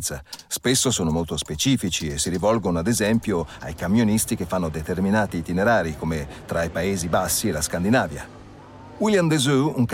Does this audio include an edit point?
no; 0 cuts

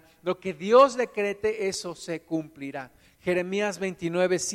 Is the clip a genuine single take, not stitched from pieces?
yes; 0 cuts

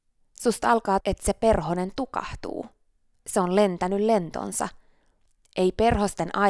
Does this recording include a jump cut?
yes; 1 cut; at 1.0 s

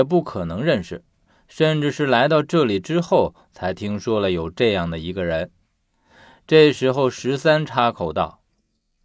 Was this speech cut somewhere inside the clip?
no; 0 cuts

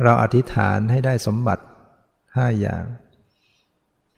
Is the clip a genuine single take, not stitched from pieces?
yes; 0 cuts

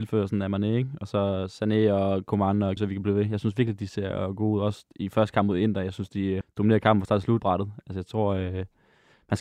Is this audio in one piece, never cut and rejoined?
no; 3 cuts; at 2.8 s, 6.4 s, 7.4 s

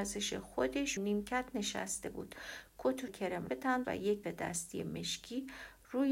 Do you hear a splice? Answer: yes; 5 cuts; at 1.0 s, 3.1 s, 3.5 s, 3.8 s, 4.2 s

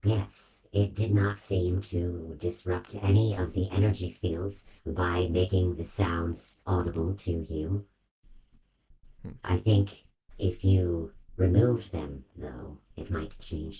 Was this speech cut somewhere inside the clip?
yes; 3 cuts; at 4.8 s, 6.6 s, 12.8 s

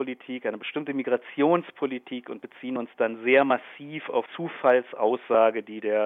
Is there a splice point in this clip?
yes; 1 cut; at 4.3 s

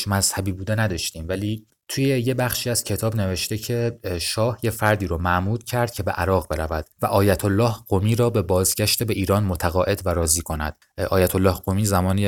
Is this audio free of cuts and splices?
yes; 0 cuts

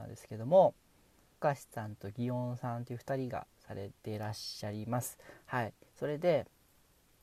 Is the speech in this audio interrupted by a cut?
yes; 2 cuts; at 1.4 s, 4.0 s

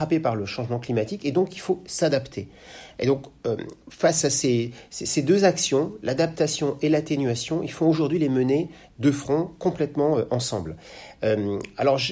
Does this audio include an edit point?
no; 0 cuts

